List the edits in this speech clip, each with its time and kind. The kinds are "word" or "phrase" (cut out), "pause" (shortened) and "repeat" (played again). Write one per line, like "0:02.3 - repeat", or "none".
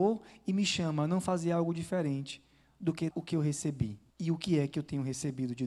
0:03.1 - word
0:04.1 - pause